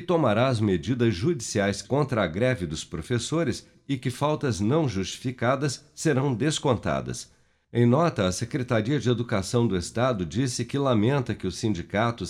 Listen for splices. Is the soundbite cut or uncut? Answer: cut